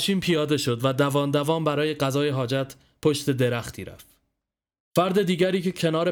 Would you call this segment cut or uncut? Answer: uncut